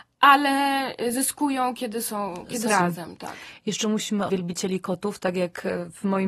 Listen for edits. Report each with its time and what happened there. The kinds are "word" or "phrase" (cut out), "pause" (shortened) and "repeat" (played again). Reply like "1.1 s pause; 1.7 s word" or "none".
2.7 s phrase; 4.3 s word